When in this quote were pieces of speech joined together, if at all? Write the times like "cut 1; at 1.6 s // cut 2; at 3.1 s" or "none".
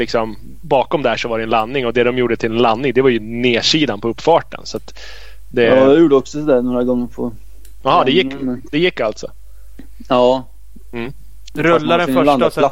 none